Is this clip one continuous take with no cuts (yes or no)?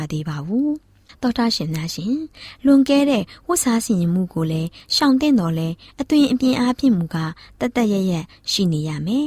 yes